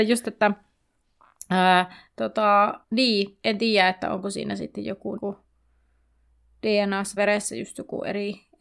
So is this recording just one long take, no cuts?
no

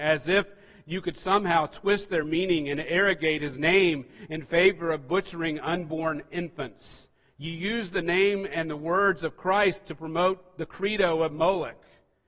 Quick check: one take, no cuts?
yes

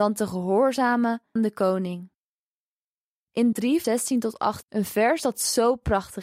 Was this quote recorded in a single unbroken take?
no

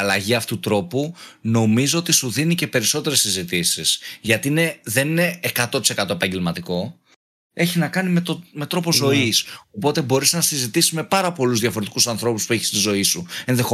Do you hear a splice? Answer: no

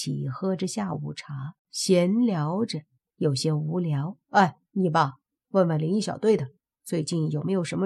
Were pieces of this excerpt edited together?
yes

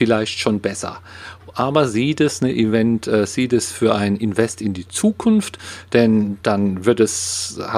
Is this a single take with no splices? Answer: yes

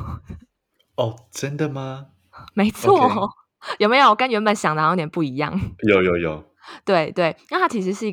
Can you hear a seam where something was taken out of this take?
no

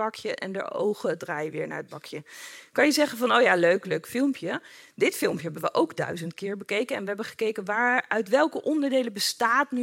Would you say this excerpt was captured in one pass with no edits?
yes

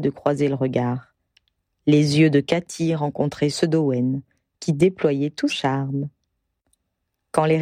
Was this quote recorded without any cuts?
no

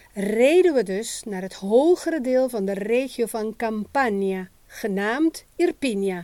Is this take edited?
yes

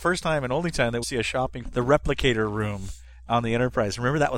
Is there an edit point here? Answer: yes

